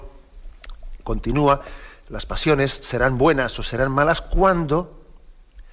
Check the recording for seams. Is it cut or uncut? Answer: uncut